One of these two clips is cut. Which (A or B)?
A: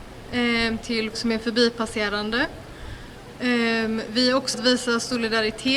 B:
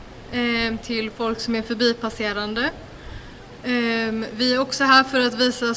A